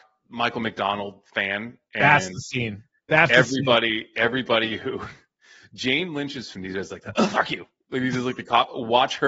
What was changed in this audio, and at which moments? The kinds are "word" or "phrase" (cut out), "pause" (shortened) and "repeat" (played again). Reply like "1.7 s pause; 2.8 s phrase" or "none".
6.5 s word